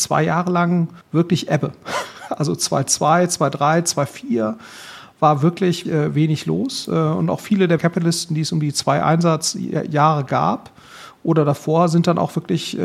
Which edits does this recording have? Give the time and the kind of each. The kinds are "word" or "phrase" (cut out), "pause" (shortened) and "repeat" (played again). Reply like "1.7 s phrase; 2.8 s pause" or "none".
1.0 s pause; 5.8 s word; 7.8 s word